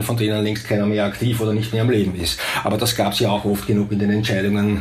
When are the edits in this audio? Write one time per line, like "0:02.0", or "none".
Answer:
none